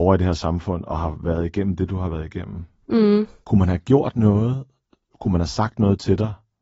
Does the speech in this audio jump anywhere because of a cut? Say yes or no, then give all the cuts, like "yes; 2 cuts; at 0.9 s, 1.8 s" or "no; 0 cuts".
no; 0 cuts